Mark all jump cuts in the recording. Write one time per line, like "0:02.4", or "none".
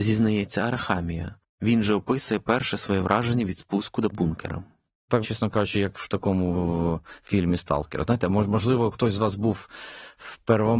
0:04.1
0:05.2